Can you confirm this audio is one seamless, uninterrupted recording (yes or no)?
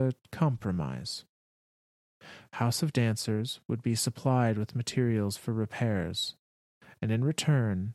yes